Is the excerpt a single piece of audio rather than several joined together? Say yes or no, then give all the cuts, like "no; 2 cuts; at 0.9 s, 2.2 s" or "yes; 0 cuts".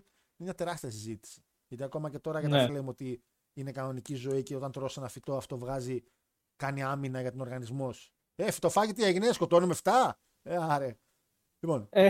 no; 1 cut; at 2.7 s